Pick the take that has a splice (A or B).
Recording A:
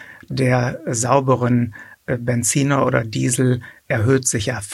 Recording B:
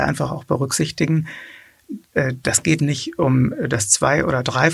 B